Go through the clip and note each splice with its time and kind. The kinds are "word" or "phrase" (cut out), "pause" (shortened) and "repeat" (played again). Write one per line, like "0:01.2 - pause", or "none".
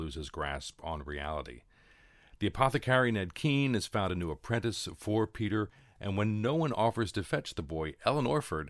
none